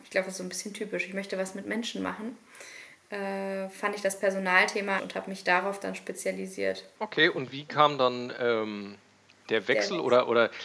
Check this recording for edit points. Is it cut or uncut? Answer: cut